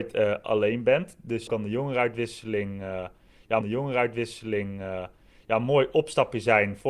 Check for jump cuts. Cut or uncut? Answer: cut